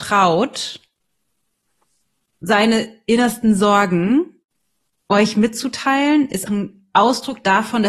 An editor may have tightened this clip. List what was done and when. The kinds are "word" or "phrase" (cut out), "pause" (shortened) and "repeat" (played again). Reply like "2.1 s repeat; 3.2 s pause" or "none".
6.5 s word